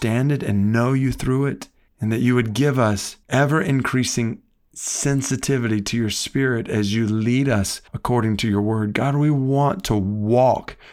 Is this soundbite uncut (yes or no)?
no